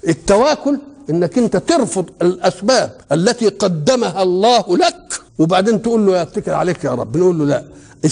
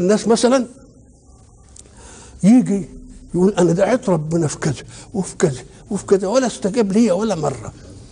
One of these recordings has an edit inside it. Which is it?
first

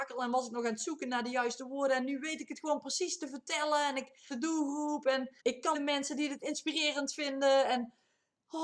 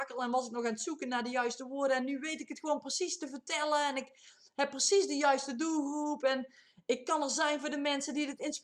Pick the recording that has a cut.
first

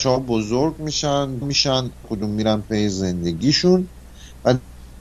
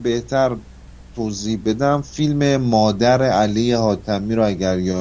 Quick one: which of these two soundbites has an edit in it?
first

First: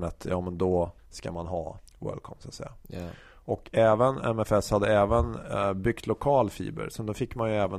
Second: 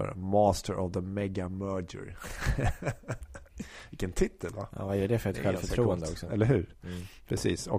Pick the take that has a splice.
first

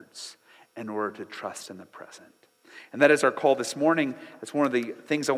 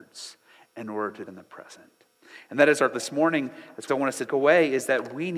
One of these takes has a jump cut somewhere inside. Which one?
second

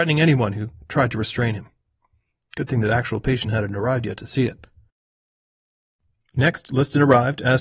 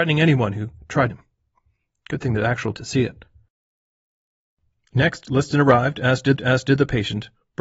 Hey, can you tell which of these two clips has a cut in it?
second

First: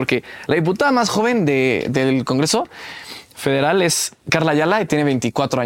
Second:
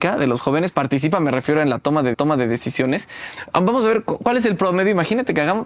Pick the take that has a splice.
second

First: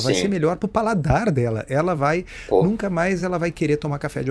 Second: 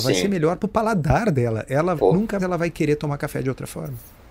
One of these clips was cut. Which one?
second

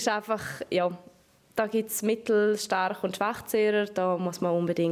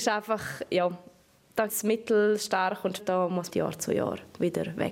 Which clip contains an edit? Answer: second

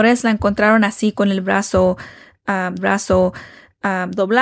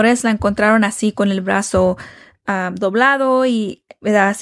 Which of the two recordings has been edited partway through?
first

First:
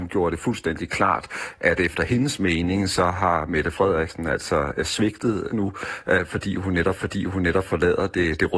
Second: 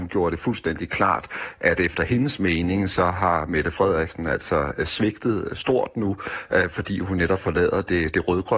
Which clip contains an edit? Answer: first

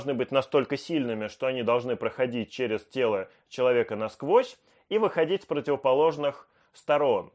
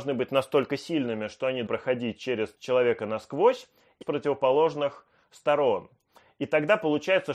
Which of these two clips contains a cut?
second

